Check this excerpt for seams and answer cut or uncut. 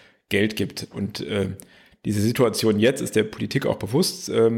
uncut